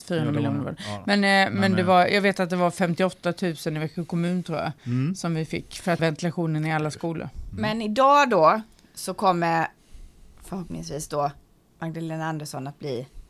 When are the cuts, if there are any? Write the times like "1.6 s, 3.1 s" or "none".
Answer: 6.0 s